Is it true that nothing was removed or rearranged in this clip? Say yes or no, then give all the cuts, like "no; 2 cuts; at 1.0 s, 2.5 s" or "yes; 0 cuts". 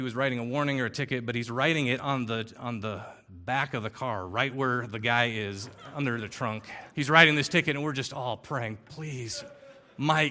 no; 1 cut; at 6.9 s